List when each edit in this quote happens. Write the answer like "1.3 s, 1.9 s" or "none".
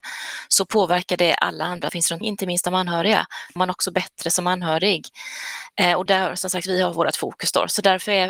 1.9 s, 2.2 s, 3.6 s, 6.1 s